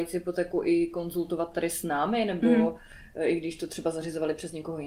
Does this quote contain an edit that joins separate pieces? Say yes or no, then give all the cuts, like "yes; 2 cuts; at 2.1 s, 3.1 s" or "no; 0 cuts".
no; 0 cuts